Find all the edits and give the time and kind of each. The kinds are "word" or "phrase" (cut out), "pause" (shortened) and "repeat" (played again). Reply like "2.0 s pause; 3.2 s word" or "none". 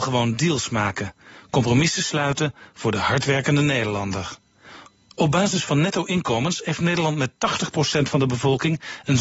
none